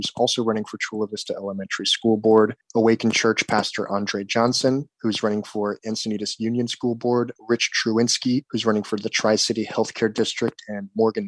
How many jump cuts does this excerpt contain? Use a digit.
0